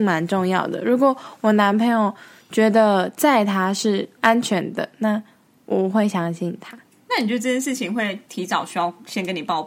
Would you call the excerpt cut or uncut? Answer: cut